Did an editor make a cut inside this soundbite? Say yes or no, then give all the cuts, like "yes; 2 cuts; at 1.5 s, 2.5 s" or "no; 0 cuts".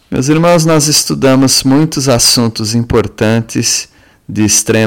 no; 0 cuts